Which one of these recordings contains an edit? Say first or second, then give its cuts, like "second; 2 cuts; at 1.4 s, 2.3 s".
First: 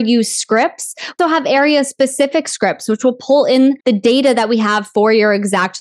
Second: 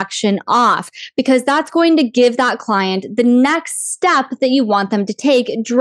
first; 2 cuts; at 1.2 s, 3.8 s